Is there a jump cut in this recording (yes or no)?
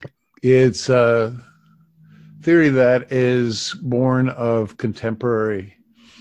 no